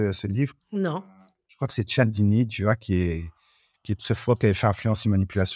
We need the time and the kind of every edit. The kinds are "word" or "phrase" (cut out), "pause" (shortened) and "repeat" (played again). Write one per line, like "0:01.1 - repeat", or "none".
none

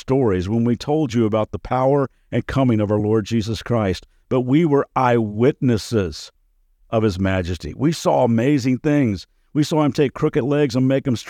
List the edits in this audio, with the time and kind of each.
none

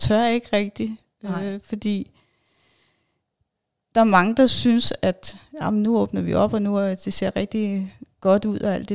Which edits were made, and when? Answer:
none

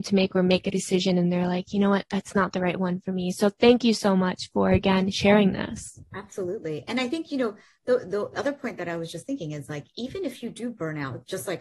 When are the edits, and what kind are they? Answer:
none

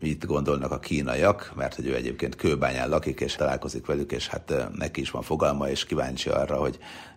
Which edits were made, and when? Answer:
0:03.4 - phrase

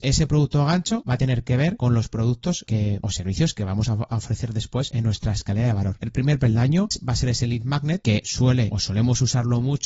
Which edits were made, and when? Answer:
none

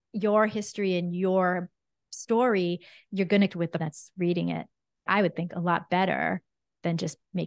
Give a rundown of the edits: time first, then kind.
0:03.5 - word
0:03.8 - word
0:05.1 - word

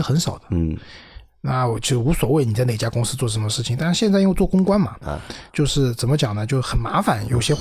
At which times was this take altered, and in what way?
0:05.5 - pause

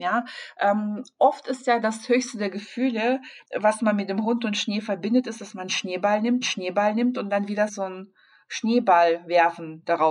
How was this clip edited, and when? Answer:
0:03.4 - pause
0:06.4 - repeat
0:07.7 - word

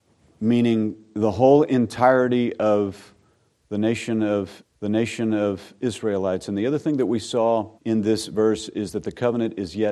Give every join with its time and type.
0:04.6 - repeat
0:07.8 - pause

